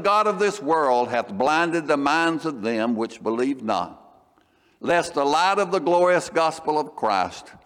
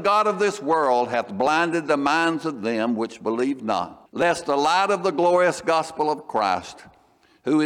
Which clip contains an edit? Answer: second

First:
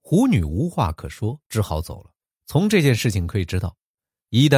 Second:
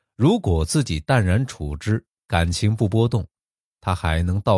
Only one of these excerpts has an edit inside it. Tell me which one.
first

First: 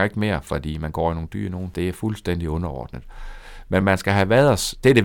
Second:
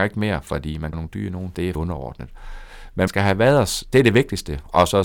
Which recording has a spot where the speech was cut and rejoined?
second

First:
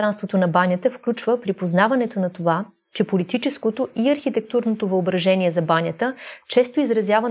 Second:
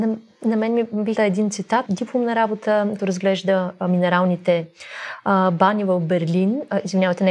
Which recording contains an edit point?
second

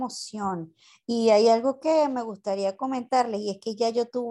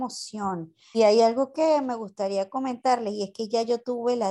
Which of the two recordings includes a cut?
second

